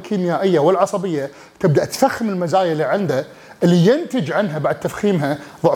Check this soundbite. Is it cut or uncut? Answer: uncut